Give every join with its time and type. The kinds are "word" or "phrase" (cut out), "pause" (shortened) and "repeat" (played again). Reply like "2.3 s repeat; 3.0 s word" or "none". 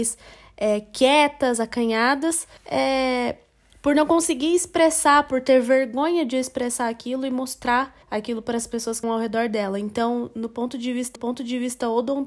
2.6 s pause; 8.0 s pause; 9.0 s word; 11.2 s repeat